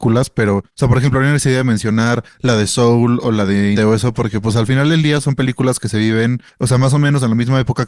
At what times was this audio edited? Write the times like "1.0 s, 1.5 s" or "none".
3.8 s